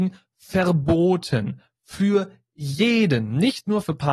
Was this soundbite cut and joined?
no; 0 cuts

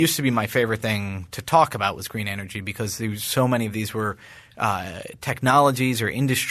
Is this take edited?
no; 0 cuts

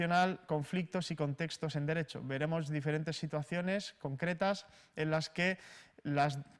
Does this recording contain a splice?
no; 0 cuts

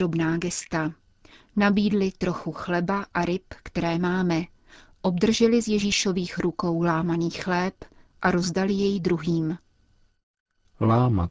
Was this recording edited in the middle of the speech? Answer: no; 0 cuts

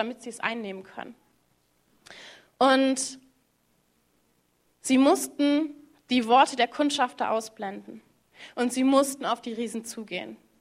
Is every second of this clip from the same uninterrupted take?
yes; 0 cuts

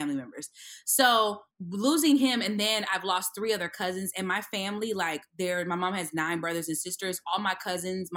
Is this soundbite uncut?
no; 1 cut; at 1.5 s

